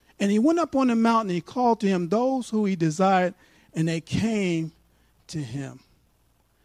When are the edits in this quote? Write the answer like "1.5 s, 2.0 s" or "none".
none